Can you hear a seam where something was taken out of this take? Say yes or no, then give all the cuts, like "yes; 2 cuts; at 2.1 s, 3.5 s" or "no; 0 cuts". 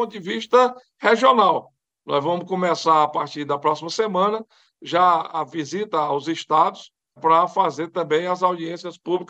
yes; 1 cut; at 7.2 s